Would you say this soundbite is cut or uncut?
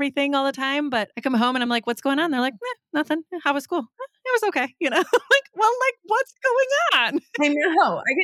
uncut